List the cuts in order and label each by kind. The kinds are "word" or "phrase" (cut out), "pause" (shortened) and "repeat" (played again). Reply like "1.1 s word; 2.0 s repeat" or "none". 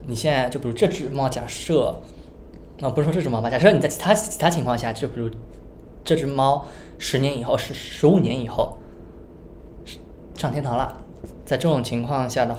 none

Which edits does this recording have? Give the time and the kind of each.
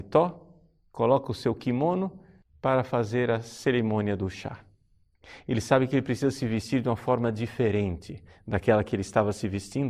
2.4 s pause

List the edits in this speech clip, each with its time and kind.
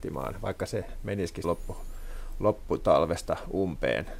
1.4 s word

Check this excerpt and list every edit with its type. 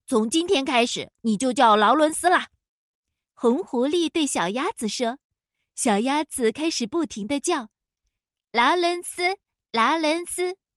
none

